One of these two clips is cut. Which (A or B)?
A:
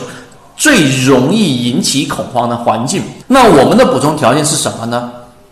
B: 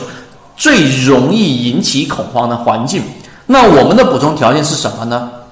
A